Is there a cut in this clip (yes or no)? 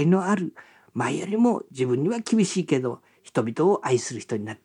yes